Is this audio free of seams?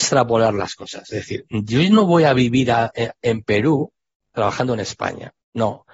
no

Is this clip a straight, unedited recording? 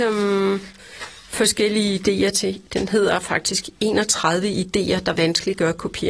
no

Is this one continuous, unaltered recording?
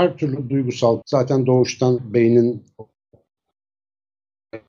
no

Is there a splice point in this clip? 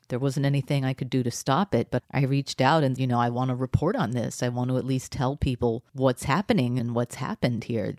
yes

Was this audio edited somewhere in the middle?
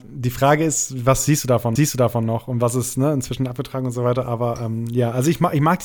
yes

